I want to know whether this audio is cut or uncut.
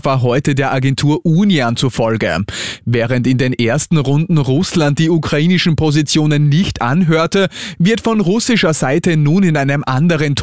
uncut